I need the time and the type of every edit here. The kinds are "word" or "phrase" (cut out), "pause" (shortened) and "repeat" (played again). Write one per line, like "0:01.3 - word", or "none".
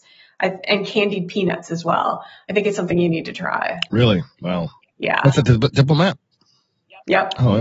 none